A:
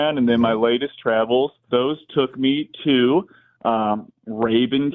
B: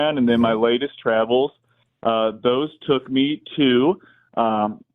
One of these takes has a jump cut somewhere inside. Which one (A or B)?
A